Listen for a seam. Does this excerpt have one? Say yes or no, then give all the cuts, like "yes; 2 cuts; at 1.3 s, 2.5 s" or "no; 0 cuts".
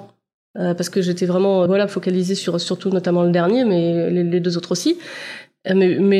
yes; 1 cut; at 1.7 s